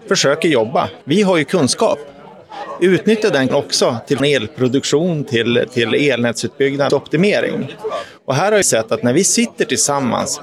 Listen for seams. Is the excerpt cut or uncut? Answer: cut